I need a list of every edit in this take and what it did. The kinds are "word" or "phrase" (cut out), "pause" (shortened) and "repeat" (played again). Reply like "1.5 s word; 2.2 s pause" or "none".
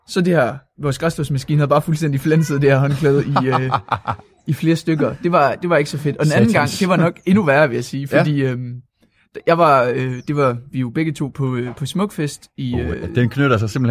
none